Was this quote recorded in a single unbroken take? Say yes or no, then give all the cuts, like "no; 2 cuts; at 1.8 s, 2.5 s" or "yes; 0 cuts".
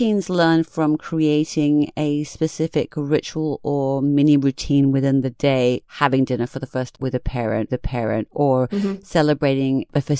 no; 3 cuts; at 5.9 s, 6.9 s, 7.7 s